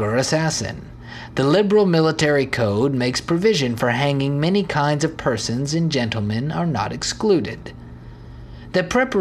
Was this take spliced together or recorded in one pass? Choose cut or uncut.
uncut